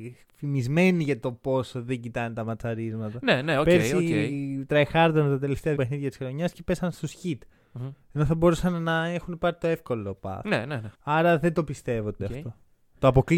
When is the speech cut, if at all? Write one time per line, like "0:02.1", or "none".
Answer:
0:05.8
0:10.9
0:12.2